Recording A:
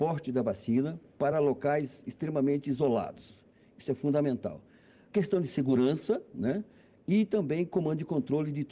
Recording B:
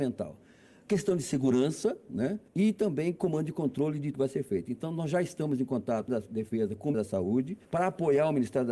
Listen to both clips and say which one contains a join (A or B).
B